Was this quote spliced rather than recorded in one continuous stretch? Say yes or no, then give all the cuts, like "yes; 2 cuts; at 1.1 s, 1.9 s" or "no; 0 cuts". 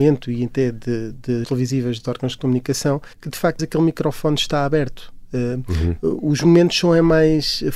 yes; 4 cuts; at 1.4 s, 2.0 s, 3.1 s, 3.6 s